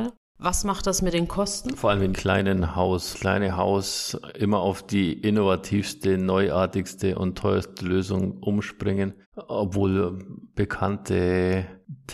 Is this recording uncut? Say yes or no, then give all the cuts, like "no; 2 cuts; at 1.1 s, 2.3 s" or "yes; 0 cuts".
no; 3 cuts; at 2.1 s, 3.1 s, 9.2 s